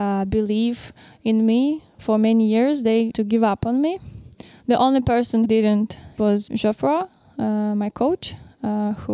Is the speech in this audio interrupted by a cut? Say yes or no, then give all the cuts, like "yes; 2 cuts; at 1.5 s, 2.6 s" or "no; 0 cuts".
yes; 4 cuts; at 3.1 s, 5.5 s, 6.2 s, 6.5 s